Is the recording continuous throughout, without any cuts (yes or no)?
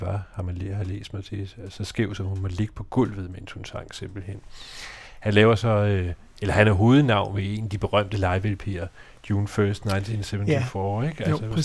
yes